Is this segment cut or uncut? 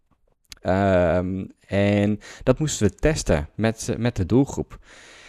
uncut